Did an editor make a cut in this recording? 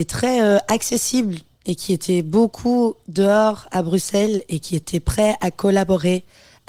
no; 0 cuts

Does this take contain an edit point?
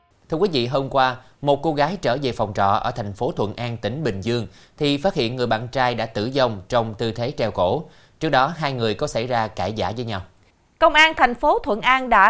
no; 0 cuts

